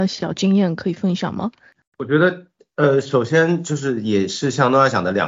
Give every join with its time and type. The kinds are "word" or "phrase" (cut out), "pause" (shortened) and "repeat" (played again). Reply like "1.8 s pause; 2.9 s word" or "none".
none